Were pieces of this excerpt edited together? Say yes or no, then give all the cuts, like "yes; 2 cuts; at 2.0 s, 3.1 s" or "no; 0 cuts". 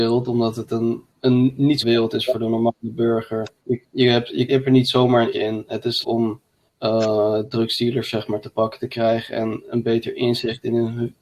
yes; 7 cuts; at 1.1 s, 1.8 s, 3.6 s, 4.5 s, 5.3 s, 6.0 s, 6.7 s